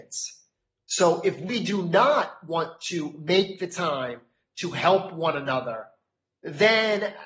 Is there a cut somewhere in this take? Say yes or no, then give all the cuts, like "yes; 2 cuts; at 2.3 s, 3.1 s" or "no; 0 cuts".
no; 0 cuts